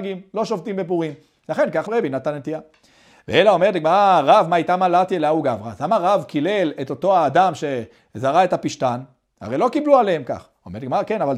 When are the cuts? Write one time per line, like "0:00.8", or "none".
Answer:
0:01.9